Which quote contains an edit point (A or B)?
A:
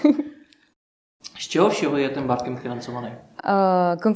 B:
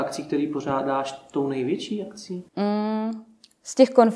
B